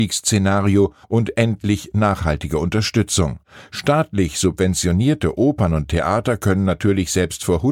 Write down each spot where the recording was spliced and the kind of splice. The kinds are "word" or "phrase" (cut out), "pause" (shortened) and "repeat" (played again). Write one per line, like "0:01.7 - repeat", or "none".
0:01.0 - pause